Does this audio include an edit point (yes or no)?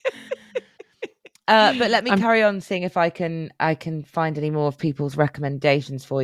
no